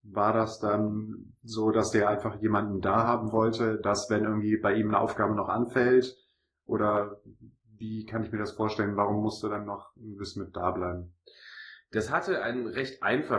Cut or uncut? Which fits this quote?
uncut